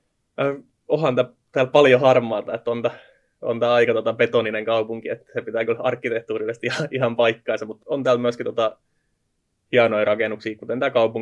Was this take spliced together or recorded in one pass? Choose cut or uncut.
cut